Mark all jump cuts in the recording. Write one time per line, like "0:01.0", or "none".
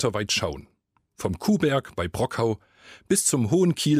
none